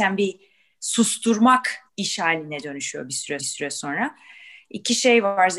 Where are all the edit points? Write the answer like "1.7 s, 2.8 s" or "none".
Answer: 1.9 s, 3.4 s